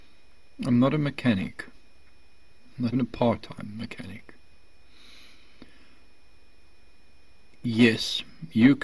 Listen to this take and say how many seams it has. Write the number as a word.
one